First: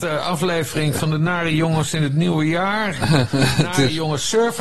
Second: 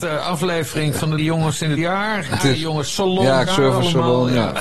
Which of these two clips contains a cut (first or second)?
second